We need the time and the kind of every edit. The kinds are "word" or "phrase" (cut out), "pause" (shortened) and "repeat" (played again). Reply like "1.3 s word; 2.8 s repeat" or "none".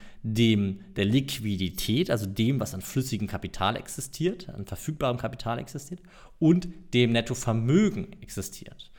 none